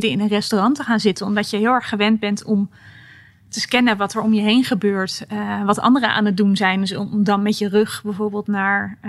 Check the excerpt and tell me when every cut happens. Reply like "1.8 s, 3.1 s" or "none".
none